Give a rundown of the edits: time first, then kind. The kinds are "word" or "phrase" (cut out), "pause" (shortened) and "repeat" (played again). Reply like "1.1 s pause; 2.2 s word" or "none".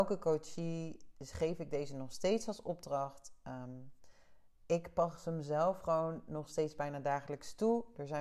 none